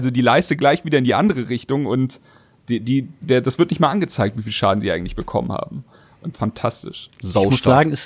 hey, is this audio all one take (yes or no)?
no